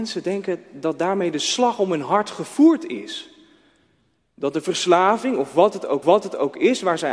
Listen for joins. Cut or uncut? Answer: cut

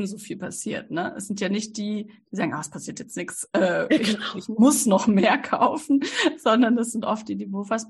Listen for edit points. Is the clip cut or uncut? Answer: uncut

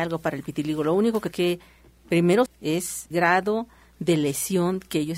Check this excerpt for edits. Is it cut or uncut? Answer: cut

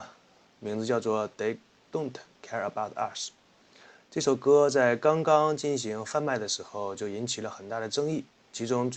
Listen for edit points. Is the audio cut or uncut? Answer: uncut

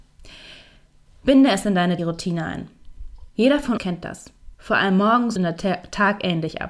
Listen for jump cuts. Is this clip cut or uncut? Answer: cut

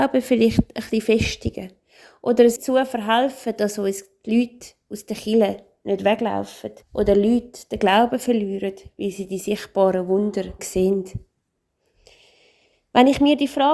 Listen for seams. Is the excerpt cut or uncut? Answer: cut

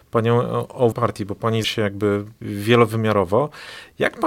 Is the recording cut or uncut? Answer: cut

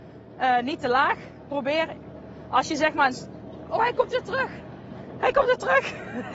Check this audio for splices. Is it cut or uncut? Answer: uncut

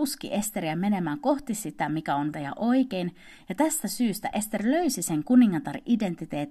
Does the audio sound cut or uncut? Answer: cut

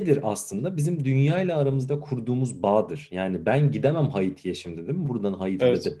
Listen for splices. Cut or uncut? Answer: uncut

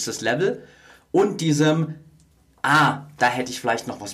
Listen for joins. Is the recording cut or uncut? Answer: uncut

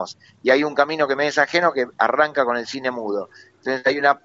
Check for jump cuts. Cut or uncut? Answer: uncut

